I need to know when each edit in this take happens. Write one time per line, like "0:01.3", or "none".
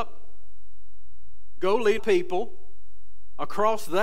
0:02.0